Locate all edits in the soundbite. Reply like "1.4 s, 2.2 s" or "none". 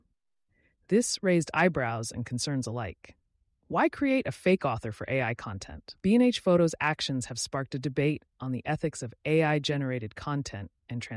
none